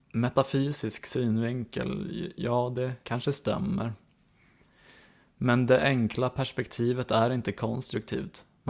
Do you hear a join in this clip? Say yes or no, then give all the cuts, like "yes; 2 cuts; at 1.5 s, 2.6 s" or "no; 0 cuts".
yes; 1 cut; at 3.0 s